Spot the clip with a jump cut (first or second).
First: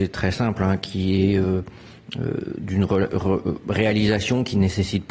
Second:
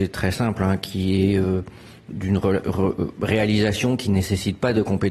second